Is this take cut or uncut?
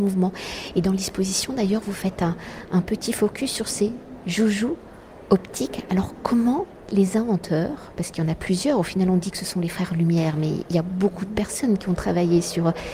uncut